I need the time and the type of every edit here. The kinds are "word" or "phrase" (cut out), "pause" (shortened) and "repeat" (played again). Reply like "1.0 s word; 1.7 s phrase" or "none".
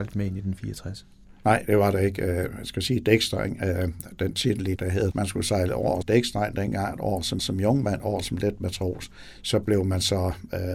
4.8 s word; 5.1 s phrase; 6.0 s word; 7.4 s repeat